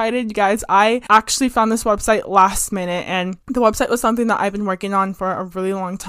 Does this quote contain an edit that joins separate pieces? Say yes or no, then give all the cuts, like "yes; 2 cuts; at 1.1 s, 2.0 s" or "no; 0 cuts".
yes; 1 cut; at 3.4 s